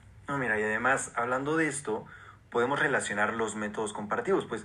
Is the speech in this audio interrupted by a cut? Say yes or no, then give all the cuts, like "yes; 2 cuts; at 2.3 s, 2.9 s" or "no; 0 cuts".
no; 0 cuts